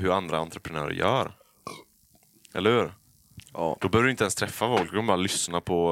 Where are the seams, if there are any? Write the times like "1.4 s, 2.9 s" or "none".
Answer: none